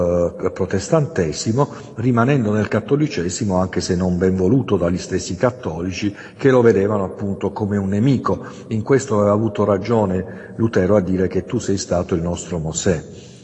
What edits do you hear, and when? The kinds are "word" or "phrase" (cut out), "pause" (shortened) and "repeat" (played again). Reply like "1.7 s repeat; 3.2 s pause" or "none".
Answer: none